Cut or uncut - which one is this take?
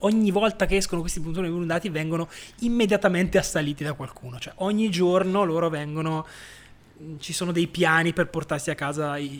uncut